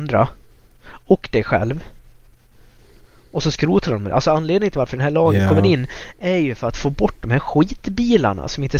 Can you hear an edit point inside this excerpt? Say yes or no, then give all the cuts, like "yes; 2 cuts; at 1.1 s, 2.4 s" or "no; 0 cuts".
no; 0 cuts